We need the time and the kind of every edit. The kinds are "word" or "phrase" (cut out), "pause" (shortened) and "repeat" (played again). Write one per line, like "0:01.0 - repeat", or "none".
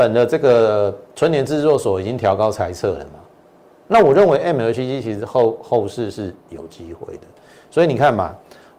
none